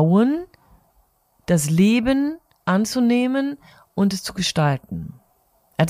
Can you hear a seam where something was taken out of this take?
yes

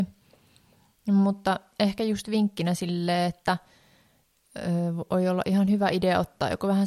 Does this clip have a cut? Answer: no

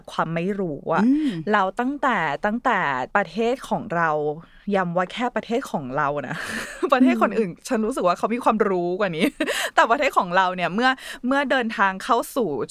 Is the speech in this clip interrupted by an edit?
yes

